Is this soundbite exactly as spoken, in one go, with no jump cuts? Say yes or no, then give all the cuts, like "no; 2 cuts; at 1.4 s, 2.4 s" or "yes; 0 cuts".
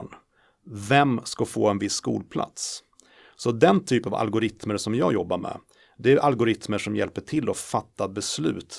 yes; 0 cuts